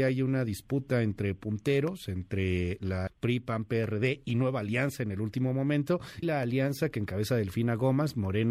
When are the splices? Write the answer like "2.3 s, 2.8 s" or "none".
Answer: 3.1 s, 6.2 s